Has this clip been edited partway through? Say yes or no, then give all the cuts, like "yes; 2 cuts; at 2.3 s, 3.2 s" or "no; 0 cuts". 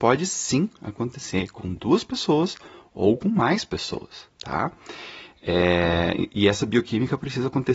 no; 0 cuts